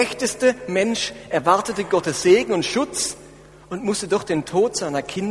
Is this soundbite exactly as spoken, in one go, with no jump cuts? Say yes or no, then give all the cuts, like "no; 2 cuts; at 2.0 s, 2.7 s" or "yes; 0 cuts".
yes; 0 cuts